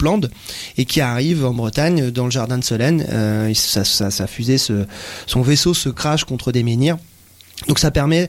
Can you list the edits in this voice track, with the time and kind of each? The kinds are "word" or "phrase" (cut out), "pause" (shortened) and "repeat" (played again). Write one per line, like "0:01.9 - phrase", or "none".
none

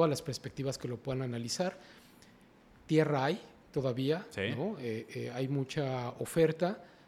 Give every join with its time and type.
none

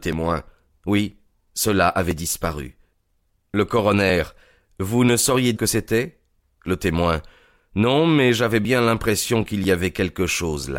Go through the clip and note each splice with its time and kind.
0:05.5 - phrase

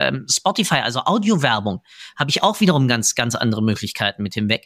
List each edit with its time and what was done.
none

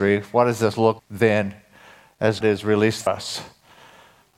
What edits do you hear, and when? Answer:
0:01.0 - word
0:02.4 - word
0:03.1 - word

